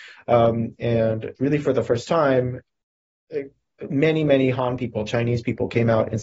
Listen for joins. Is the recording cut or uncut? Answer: cut